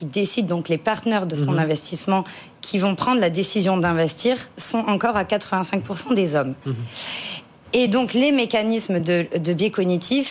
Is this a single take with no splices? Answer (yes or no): yes